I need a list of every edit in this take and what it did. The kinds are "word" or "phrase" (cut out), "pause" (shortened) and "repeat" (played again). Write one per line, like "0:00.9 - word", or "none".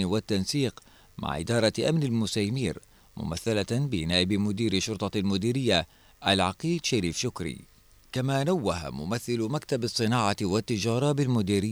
none

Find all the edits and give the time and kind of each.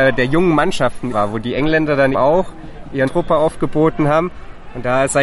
0:01.1 - word
0:02.1 - word
0:03.1 - word

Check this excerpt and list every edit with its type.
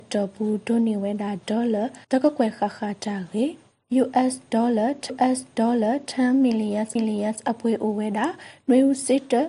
0:02.0 - pause
0:05.1 - repeat
0:07.0 - repeat

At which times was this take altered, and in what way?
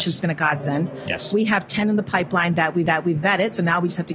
0:02.9 - repeat

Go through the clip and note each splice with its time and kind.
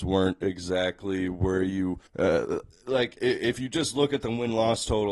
0:02.1 - pause

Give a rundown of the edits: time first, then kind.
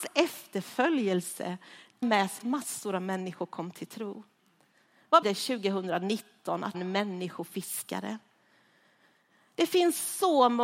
0:02.0 - word
0:02.4 - word
0:05.2 - word
0:06.7 - word

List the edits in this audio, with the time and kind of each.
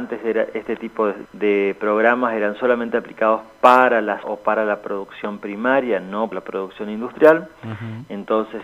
0:01.3 - word
0:04.2 - word
0:06.3 - word

